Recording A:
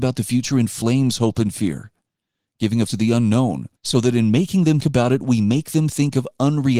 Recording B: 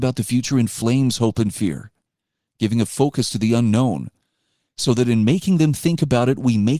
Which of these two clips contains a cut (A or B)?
A